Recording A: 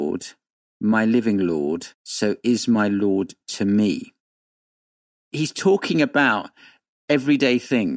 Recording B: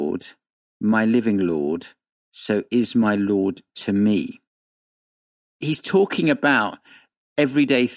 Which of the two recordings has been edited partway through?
A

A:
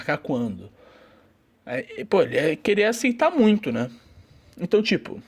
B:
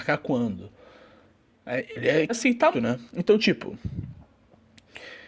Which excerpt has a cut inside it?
B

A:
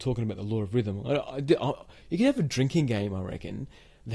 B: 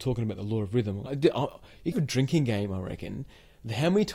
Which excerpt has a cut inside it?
B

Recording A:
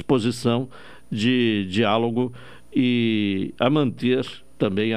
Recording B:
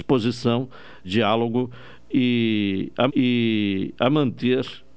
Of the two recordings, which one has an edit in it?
B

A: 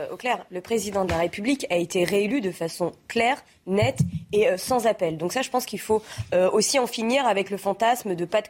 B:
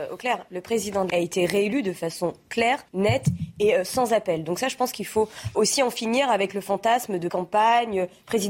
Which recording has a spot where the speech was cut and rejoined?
B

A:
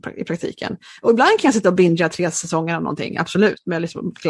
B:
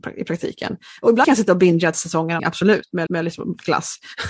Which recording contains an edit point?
B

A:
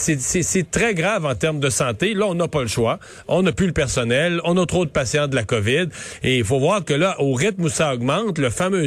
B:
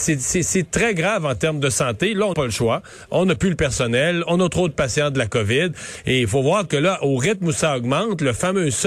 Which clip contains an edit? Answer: B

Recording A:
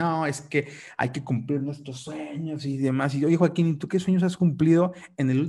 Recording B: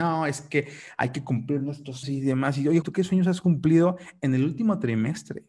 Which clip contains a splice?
B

